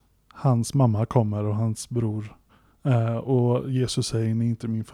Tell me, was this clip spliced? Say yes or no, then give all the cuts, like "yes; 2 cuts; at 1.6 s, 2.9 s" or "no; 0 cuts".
no; 0 cuts